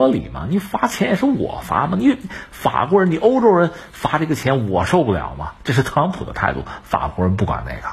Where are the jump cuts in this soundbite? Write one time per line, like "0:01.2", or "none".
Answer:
none